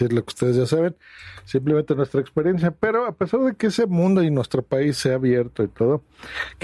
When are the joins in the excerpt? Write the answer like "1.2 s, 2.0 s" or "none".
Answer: none